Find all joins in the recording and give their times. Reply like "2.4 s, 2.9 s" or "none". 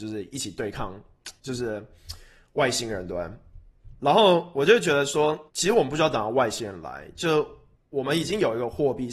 1.4 s, 5.5 s, 7.7 s

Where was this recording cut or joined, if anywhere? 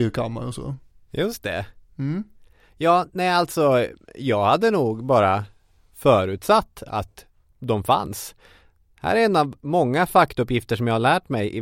none

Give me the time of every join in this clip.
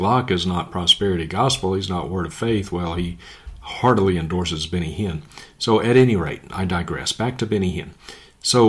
none

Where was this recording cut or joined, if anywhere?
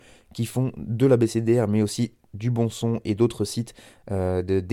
none

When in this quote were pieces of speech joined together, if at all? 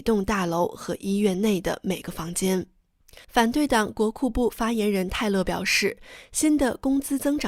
3.2 s

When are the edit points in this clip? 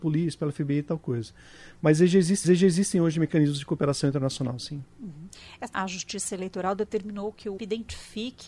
2.4 s, 5.7 s, 7.6 s

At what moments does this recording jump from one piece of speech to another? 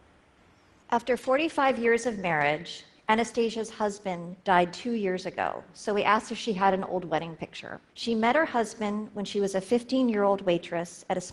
4.4 s, 7.9 s

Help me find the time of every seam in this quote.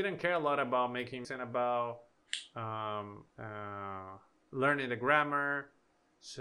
1.2 s, 3.3 s

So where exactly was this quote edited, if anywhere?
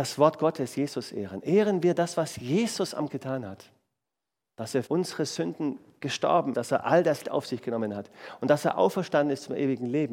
3.1 s, 4.9 s, 6.5 s, 7.2 s

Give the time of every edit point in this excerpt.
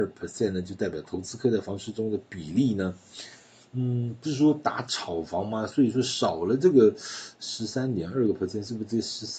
none

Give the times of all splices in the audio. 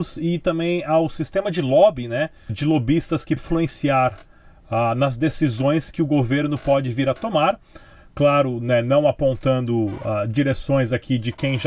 2.5 s, 3.4 s

